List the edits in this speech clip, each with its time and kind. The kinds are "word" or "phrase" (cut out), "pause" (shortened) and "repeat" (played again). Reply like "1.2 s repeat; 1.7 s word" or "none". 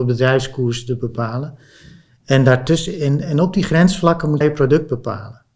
4.4 s word